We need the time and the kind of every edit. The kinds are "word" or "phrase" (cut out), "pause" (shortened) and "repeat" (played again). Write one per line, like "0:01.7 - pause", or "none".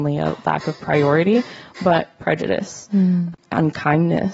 none